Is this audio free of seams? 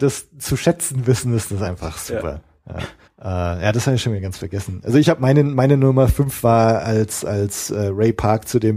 no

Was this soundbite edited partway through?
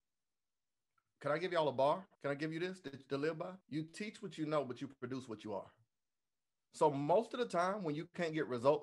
yes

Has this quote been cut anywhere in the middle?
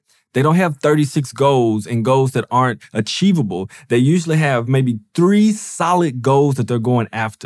no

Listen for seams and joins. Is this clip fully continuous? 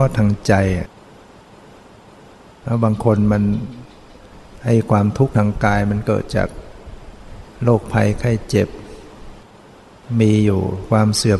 yes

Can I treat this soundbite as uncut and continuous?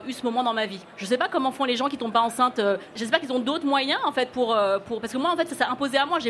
yes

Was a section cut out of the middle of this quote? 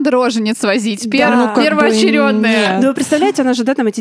no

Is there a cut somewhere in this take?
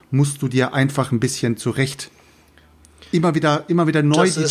no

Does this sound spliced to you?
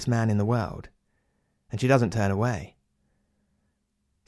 no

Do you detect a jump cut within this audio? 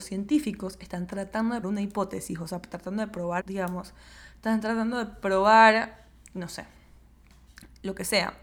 yes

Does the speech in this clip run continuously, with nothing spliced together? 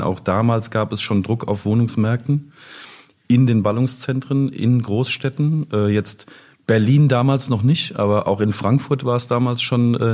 yes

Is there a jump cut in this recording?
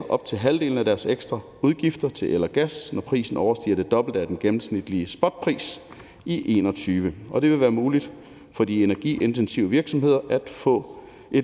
no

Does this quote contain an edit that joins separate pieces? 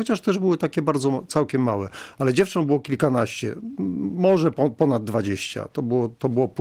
no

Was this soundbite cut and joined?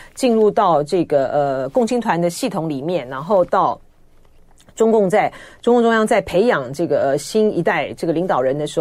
no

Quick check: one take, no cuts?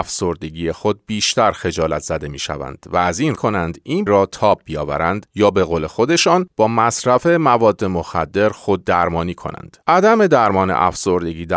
no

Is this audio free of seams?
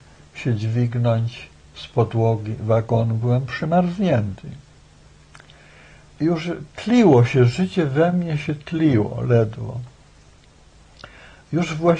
no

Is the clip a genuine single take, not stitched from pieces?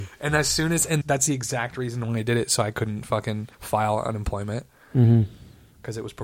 no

